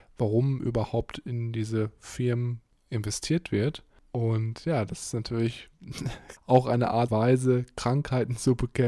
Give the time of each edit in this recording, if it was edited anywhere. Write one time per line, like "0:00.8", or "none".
0:07.1